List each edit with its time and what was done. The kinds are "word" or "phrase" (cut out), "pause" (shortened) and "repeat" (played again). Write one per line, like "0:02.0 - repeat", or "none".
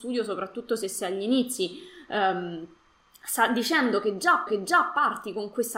0:04.5 - repeat